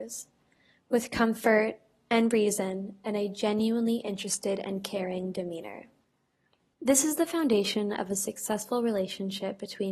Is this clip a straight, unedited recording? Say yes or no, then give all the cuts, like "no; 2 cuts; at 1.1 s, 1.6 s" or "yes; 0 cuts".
yes; 0 cuts